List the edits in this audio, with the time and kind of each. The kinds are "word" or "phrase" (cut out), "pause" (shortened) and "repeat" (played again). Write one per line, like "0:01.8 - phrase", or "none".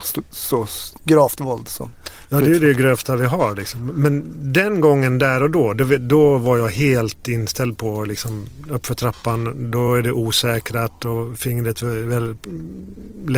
none